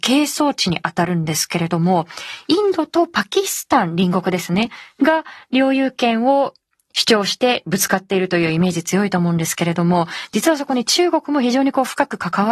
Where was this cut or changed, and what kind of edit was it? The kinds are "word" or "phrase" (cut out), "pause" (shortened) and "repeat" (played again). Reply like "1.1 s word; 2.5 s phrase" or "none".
none